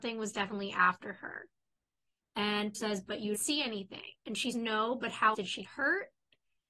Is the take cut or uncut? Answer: cut